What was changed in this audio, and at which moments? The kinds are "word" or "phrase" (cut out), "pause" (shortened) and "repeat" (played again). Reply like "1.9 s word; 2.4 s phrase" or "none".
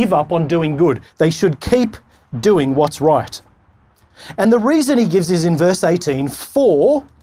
none